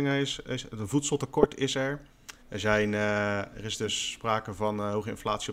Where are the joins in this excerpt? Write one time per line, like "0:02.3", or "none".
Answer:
0:02.4